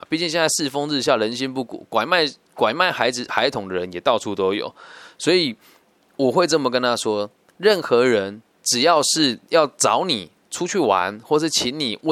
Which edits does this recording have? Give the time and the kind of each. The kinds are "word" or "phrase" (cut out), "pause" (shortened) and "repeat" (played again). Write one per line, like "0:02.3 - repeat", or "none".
none